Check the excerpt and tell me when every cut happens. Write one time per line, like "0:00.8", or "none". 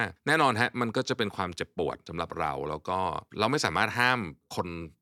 none